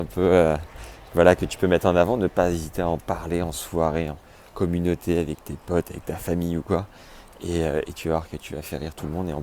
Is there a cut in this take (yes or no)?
no